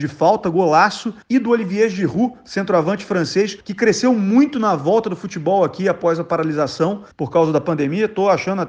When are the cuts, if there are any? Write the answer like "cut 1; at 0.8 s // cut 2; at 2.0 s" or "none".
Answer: cut 1; at 1.2 s // cut 2; at 3.6 s // cut 3; at 7.1 s